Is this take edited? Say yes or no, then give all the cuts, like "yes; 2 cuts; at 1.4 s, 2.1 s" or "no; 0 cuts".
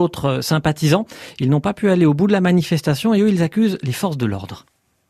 no; 0 cuts